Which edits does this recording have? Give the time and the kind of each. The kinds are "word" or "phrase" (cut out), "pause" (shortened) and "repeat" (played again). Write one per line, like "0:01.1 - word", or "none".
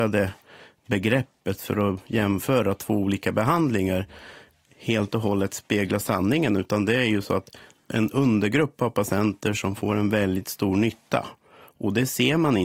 none